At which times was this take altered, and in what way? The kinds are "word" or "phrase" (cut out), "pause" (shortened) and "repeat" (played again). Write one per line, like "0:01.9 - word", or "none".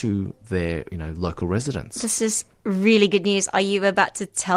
none